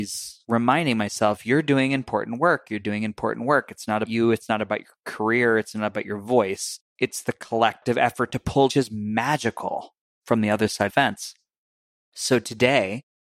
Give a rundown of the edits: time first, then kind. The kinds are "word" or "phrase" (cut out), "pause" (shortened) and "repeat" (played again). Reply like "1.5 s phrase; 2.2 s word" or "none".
4.0 s word; 6.9 s pause; 8.7 s phrase; 10.0 s pause; 10.9 s phrase